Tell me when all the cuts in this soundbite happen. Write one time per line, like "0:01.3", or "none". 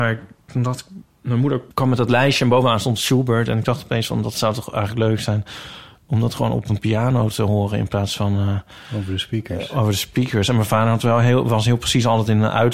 0:01.7